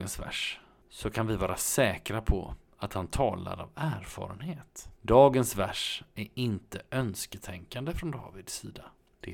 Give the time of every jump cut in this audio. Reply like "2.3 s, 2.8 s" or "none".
4.9 s